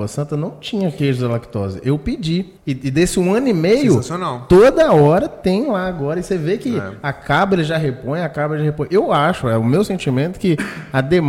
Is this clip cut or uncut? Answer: cut